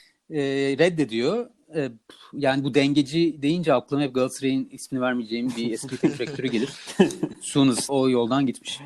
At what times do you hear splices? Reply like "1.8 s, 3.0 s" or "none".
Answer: 7.9 s